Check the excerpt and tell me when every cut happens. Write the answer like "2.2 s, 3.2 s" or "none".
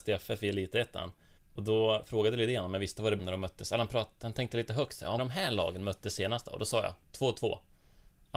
1.4 s, 3.2 s, 5.2 s